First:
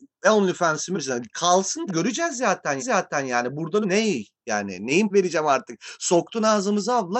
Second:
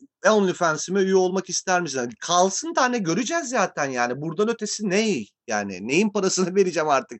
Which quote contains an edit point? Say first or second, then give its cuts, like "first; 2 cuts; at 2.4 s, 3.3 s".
first; 5 cuts; at 0.9 s, 1.9 s, 2.8 s, 3.8 s, 5.1 s